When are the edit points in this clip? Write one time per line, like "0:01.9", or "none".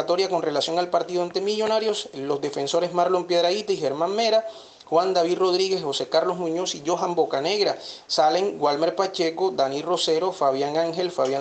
none